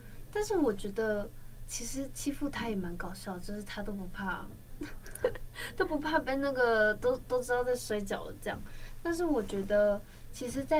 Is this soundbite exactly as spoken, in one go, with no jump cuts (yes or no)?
no